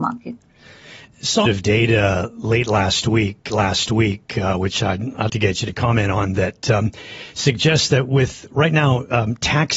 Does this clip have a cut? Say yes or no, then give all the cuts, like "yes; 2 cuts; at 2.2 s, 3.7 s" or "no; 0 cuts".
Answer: yes; 3 cuts; at 1.5 s, 3.5 s, 5.3 s